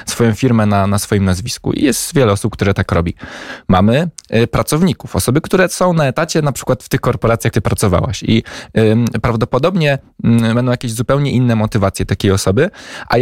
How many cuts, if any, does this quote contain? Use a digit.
1